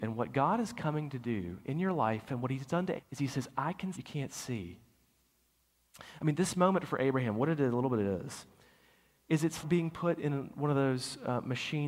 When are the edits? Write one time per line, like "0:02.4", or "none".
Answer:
0:03.0
0:03.9
0:09.6